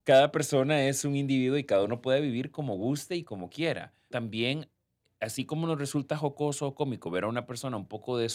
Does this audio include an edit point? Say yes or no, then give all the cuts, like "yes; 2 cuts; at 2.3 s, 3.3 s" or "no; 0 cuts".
yes; 1 cut; at 4.1 s